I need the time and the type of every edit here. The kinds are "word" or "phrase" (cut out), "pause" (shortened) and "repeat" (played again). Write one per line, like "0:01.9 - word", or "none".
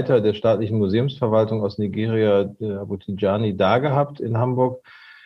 none